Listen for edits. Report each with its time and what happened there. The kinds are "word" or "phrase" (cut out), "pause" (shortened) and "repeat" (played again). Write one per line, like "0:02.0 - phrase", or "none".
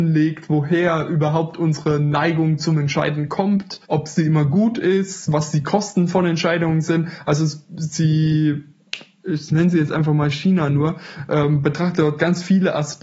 0:03.8 - pause